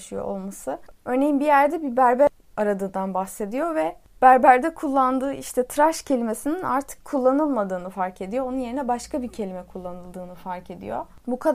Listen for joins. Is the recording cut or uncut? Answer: uncut